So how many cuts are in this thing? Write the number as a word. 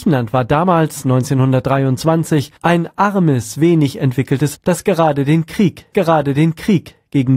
three